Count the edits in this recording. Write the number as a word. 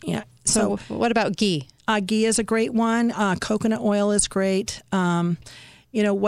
one